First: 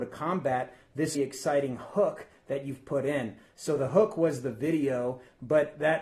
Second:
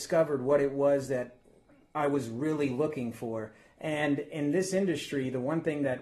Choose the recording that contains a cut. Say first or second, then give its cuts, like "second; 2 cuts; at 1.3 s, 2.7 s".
first; 1 cut; at 1.1 s